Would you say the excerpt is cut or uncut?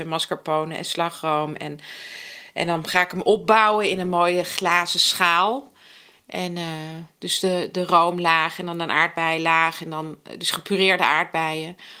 uncut